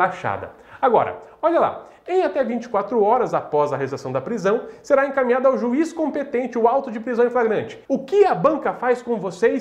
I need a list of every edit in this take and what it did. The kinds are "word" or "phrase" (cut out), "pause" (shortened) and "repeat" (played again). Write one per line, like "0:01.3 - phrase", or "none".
0:07.8 - pause